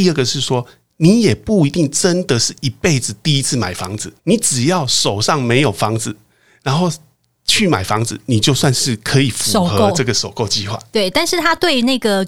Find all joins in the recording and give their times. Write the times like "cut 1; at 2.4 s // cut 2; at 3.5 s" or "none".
cut 1; at 4.2 s